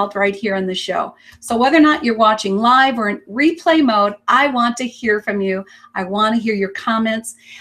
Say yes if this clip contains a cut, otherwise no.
no